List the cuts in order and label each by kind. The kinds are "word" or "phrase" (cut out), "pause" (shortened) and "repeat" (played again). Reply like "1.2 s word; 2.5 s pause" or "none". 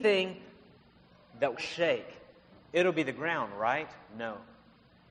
1.5 s word